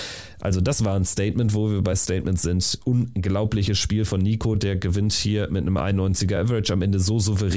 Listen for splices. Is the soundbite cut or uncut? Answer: uncut